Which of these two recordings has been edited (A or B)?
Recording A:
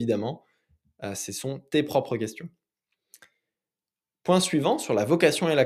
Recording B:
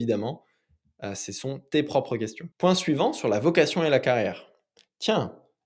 B